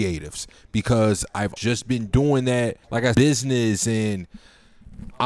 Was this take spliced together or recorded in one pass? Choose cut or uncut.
cut